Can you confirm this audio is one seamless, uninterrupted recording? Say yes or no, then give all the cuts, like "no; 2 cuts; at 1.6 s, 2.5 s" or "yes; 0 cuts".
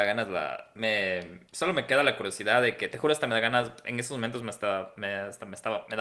no; 1 cut; at 1.5 s